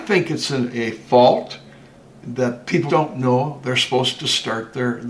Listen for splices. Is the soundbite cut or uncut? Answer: cut